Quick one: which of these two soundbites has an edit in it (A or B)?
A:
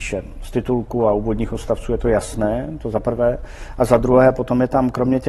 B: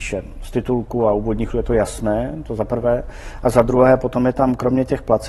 B